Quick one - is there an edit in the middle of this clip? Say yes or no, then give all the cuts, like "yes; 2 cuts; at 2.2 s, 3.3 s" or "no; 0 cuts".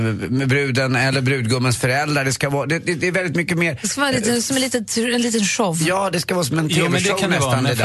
no; 0 cuts